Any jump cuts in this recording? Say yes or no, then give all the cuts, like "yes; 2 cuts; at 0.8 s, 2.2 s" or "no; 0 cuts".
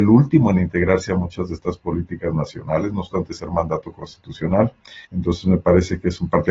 yes; 1 cut; at 5.0 s